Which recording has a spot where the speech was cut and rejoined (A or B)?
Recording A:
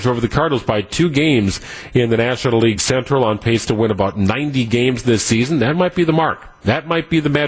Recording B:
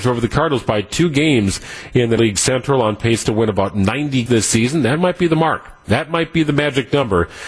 B